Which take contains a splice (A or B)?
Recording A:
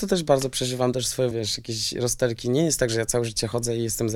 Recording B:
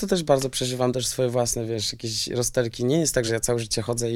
A